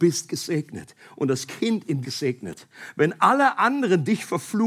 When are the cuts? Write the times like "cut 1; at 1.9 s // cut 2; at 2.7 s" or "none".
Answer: cut 1; at 2.0 s